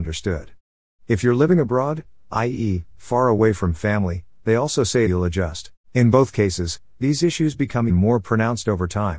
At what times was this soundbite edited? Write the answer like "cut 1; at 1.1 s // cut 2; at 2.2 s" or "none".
cut 1; at 5.1 s // cut 2; at 5.8 s // cut 3; at 7.9 s

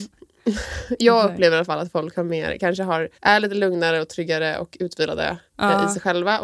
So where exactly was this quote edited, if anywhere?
cut 1; at 3.1 s // cut 2; at 5.5 s

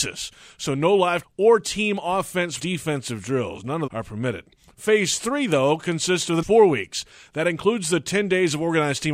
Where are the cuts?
cut 1; at 1.2 s // cut 2; at 2.6 s // cut 3; at 3.9 s // cut 4; at 6.4 s

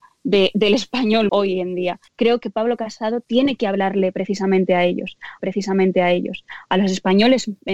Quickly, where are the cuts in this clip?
cut 1; at 1.3 s // cut 2; at 2.1 s // cut 3; at 5.4 s

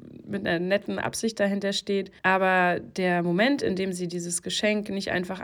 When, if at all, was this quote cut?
cut 1; at 2.2 s

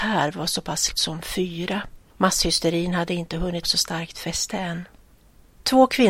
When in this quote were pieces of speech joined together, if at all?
cut 1; at 0.9 s // cut 2; at 2.1 s // cut 3; at 3.6 s

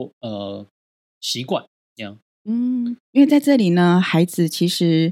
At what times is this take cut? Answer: cut 1; at 1.8 s // cut 2; at 3.0 s

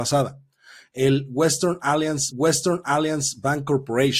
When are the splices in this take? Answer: cut 1; at 2.3 s

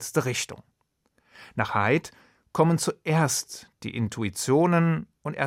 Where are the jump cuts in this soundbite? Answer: none

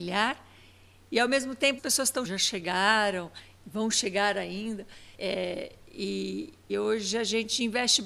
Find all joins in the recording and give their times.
cut 1; at 1.8 s // cut 2; at 2.2 s // cut 3; at 5.1 s // cut 4; at 6.7 s

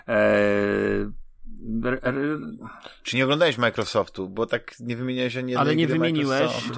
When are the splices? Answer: none

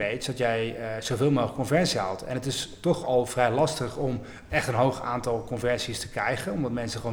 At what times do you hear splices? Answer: none

